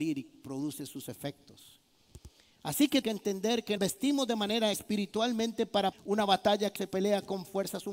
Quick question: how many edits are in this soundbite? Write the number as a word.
five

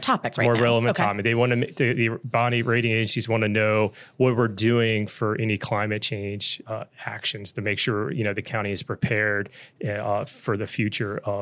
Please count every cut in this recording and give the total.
zero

